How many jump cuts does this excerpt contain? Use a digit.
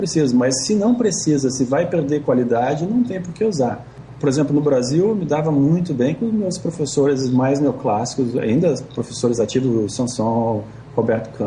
0